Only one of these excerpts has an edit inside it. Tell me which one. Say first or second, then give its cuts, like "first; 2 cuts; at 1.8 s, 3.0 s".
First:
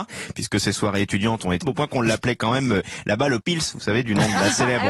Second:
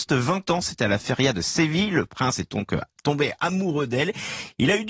first; 2 cuts; at 1.6 s, 3.4 s